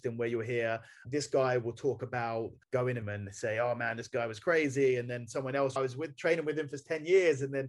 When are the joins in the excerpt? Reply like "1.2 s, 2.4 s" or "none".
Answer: 1.0 s, 2.6 s, 3.0 s, 5.8 s